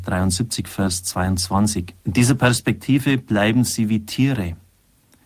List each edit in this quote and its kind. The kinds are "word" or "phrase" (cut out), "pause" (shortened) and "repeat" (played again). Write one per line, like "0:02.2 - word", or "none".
0:02.0 - pause